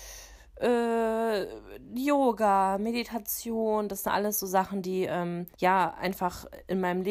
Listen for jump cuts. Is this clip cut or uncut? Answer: cut